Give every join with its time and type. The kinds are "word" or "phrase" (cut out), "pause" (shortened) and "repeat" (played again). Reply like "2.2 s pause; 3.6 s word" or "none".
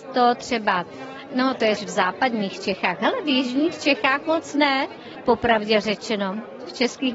1.8 s word